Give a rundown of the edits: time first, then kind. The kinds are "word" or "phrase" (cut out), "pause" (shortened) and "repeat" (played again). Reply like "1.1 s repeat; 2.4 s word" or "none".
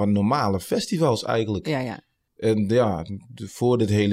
2.3 s pause